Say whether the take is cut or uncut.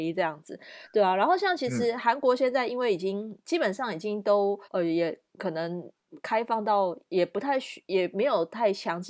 cut